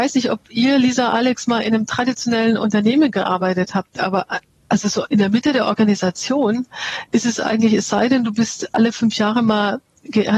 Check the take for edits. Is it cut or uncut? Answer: uncut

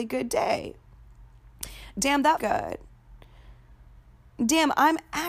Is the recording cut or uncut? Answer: cut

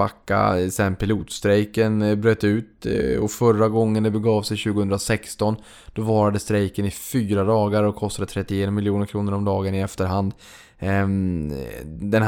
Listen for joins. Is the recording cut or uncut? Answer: uncut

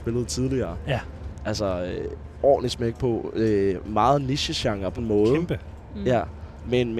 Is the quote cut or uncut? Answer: cut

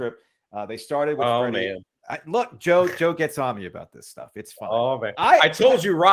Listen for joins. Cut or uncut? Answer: uncut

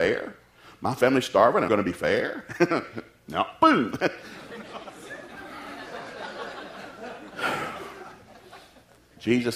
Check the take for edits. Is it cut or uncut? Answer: cut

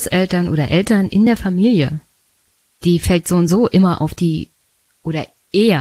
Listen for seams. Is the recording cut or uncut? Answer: uncut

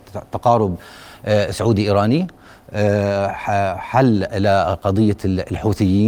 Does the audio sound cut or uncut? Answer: uncut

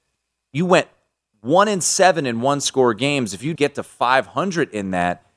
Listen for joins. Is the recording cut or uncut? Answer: cut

